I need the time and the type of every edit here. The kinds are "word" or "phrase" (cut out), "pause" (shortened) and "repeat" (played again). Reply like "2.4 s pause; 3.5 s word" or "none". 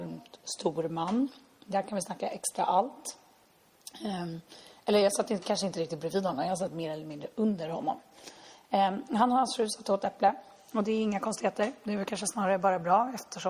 none